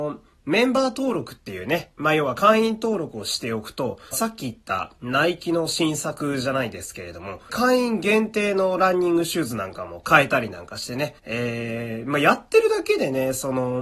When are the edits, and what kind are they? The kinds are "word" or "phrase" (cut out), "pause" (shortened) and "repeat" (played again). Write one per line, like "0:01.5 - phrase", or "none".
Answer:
0:04.1 - phrase
0:07.5 - phrase
0:11.2 - pause